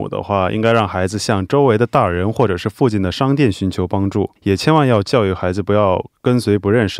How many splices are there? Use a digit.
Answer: 1